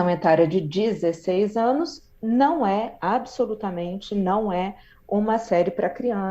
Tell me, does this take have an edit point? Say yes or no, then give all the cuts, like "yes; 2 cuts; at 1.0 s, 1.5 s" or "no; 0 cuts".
no; 0 cuts